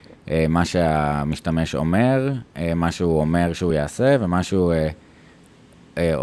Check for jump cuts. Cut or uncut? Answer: uncut